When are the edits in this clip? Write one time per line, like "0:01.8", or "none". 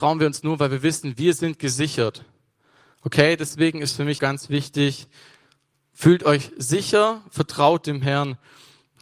0:04.2